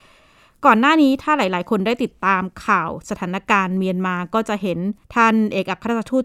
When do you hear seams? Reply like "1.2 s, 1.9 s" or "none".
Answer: 5.0 s

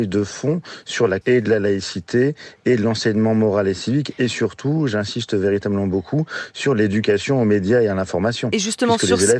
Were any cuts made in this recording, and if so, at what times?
1.2 s

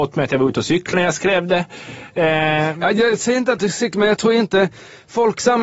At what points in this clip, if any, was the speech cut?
0.9 s, 3.6 s

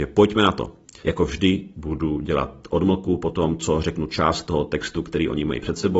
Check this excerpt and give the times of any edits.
1.0 s

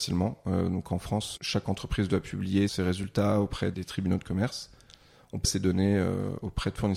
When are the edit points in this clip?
1.4 s, 2.7 s, 3.7 s, 5.4 s

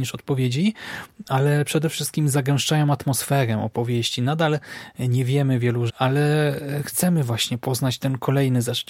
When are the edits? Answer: 5.9 s

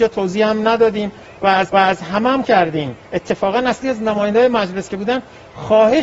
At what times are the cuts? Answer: 1.7 s, 2.4 s, 3.0 s, 3.8 s, 4.9 s

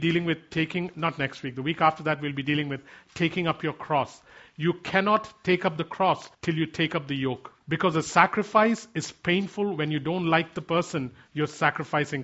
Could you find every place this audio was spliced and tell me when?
6.3 s, 7.6 s

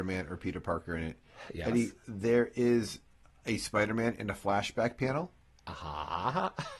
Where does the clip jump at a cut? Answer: none

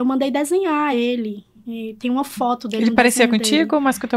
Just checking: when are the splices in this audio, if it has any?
none

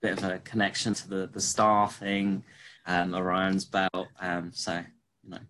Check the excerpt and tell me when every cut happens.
0.9 s, 2.8 s

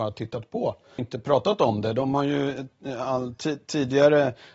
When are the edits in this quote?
1.0 s

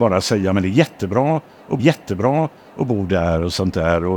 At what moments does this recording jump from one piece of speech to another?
1.8 s

